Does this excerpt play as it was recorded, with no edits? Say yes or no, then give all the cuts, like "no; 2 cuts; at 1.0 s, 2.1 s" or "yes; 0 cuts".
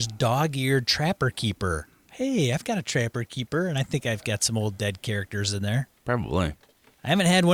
yes; 0 cuts